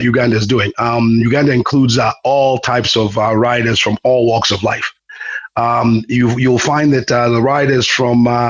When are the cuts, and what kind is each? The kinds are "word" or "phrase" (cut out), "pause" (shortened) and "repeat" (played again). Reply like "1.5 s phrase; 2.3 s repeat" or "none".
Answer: none